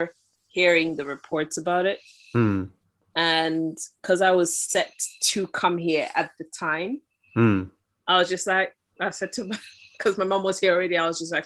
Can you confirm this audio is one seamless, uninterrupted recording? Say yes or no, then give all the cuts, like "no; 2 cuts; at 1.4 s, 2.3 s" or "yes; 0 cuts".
yes; 0 cuts